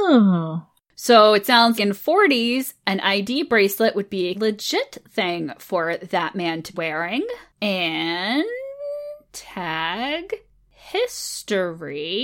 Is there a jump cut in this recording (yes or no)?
yes